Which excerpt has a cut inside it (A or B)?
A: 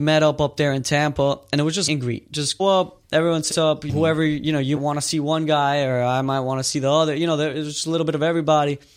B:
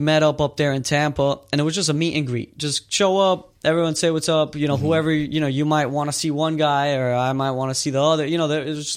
A